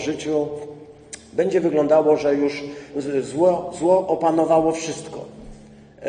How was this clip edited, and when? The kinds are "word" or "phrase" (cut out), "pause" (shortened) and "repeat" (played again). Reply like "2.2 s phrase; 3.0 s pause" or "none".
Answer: none